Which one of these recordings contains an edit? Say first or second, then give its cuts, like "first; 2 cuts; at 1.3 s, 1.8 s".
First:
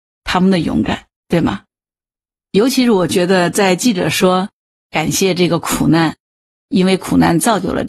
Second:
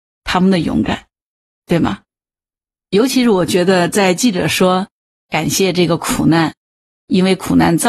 first; 1 cut; at 1.2 s